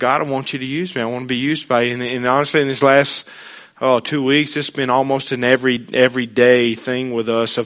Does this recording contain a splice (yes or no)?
no